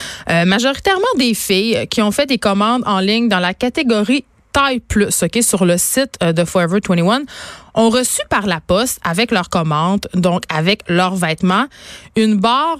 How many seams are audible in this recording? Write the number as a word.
zero